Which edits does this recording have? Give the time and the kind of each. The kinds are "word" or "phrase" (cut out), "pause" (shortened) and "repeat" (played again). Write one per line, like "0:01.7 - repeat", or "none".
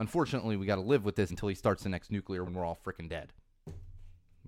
0:01.3 - word
0:02.5 - word